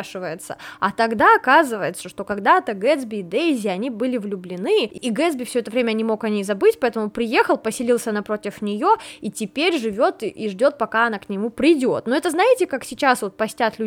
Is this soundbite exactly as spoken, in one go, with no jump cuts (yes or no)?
yes